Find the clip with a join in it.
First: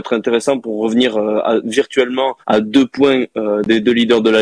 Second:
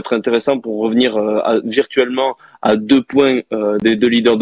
first; 1 cut; at 2.4 s

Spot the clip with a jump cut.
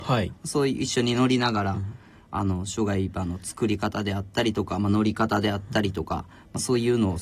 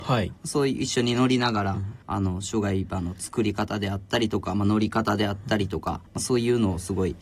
second; 2 cuts; at 2.0 s, 6.1 s

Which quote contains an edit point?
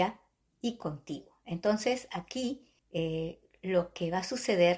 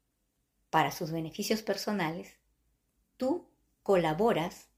first; 1 cut; at 2.8 s

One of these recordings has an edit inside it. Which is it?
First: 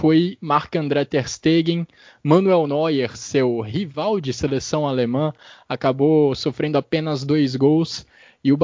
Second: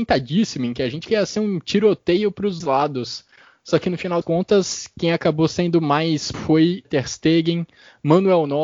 second; 5 cuts; at 1.0 s, 2.6 s, 4.2 s, 6.3 s, 6.8 s

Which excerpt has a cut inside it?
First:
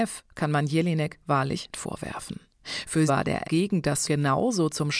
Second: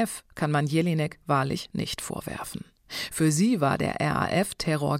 first; 4 cuts; at 1.7 s, 3.1 s, 3.4 s, 4.1 s

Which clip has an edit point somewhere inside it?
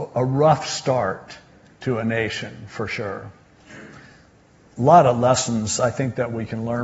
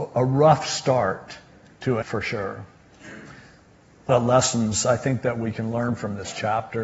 second; 2 cuts; at 2.0 s, 4.1 s

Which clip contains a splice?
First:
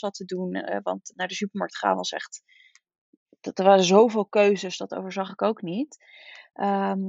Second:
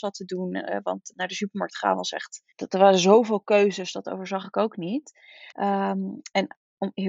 second; 2 cuts; at 2.5 s, 5.5 s

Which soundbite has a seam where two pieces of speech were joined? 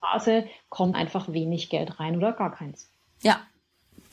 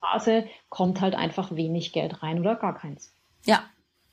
first; 1 cut; at 0.9 s

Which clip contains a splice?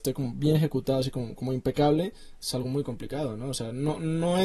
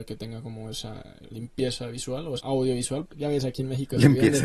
second; 3 cuts; at 1.3 s, 2.4 s, 3.1 s

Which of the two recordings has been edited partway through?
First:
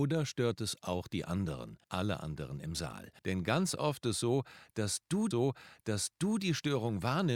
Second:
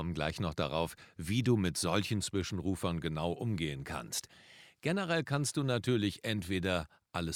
first; 4 cuts; at 1.8 s, 3.2 s, 4.0 s, 5.3 s

